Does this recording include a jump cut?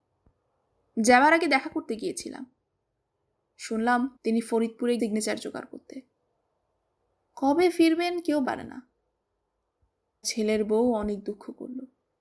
yes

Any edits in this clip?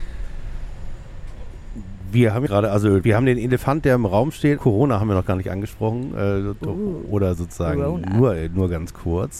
yes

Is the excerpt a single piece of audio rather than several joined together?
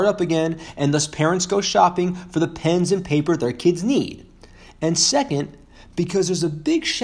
yes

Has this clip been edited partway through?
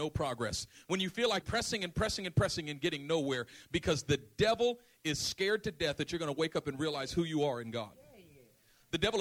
yes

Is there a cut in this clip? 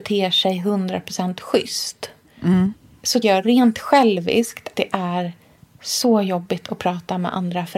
yes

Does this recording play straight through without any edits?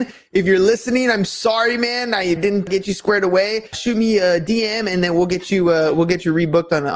no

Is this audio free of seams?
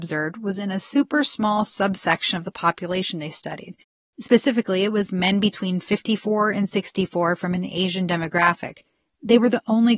yes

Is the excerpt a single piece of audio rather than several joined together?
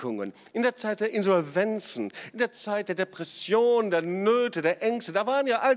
yes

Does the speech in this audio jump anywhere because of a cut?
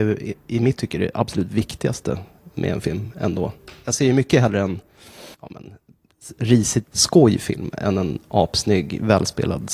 yes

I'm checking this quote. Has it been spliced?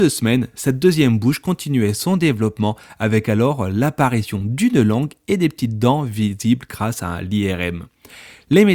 no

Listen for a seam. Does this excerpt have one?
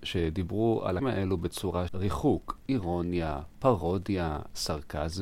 yes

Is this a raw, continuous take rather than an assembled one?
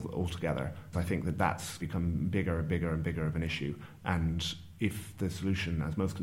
no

